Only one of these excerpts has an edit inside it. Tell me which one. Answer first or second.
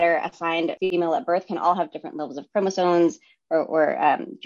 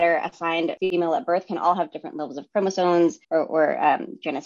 second